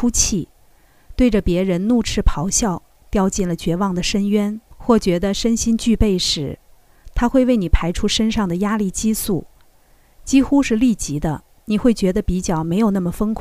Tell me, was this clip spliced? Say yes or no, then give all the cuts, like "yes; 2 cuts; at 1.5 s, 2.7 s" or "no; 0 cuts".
yes; 1 cut; at 4.7 s